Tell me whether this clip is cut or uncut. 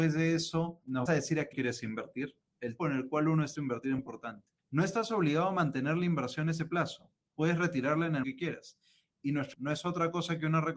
cut